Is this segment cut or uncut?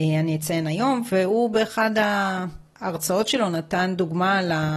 uncut